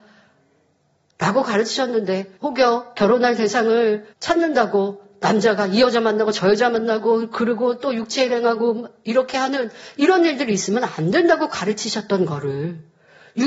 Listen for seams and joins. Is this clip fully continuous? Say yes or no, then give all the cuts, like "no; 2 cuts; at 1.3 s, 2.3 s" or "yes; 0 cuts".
no; 2 cuts; at 2.4 s, 4.1 s